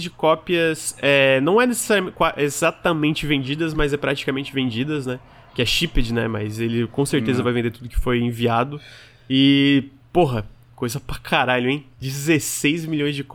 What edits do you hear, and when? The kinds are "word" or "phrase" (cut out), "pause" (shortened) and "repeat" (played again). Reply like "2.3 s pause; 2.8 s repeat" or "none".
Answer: none